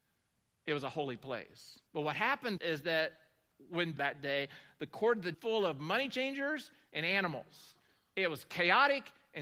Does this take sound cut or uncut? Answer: cut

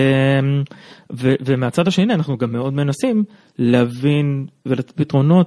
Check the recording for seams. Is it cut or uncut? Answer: uncut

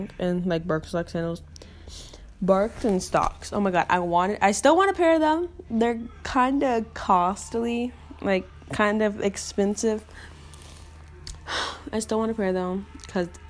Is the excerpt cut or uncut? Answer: uncut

